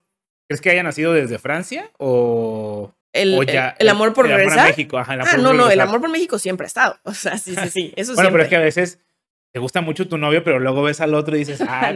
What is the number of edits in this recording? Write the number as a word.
one